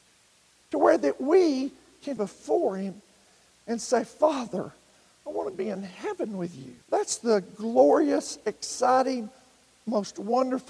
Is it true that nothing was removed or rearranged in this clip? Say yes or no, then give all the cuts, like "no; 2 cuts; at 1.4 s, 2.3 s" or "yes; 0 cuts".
no; 2 cuts; at 2.2 s, 6.8 s